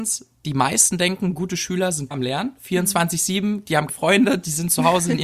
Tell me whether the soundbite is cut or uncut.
cut